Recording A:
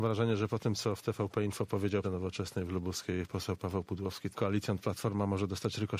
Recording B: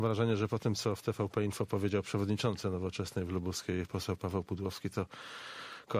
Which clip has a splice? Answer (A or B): A